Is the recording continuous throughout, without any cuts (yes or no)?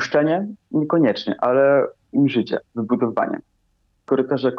no